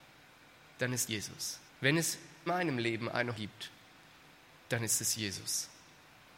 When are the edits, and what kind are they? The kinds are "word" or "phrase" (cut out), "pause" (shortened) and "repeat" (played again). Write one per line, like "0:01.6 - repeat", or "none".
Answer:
0:01.1 - word
0:01.7 - pause
0:02.5 - word
0:03.4 - word